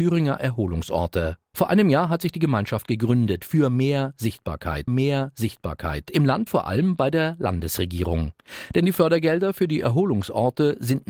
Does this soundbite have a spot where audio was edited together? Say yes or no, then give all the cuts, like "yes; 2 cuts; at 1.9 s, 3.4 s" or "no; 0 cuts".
yes; 2 cuts; at 4.9 s, 6.5 s